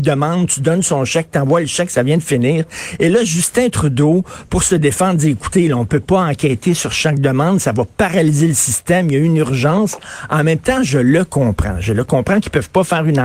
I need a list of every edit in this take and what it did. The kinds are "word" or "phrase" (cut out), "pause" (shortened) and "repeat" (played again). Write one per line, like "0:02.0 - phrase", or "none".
none